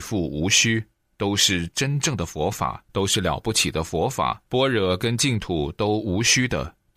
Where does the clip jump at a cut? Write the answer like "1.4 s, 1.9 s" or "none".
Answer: 2.9 s, 4.5 s